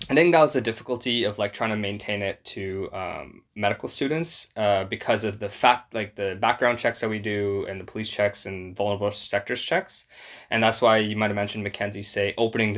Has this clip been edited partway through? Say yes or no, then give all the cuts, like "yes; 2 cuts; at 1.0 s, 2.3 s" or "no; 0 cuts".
yes; 1 cut; at 3.5 s